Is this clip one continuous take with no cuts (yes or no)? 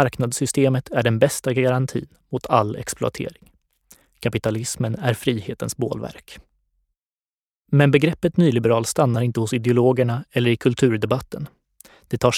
yes